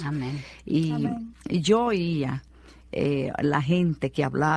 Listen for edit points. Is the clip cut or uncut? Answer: uncut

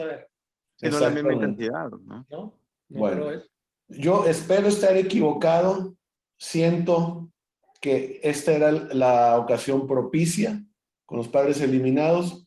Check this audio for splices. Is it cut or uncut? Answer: uncut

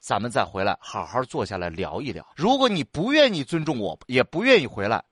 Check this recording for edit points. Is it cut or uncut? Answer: cut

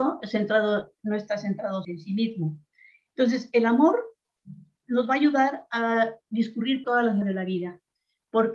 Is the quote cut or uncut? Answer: cut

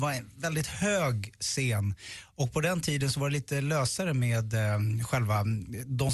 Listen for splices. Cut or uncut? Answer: uncut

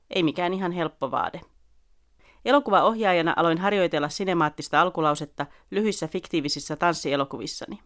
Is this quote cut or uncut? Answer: uncut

